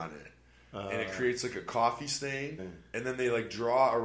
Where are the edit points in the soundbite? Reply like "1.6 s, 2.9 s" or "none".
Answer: 2.6 s